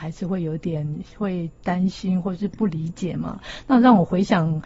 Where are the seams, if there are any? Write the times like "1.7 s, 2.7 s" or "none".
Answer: 1.1 s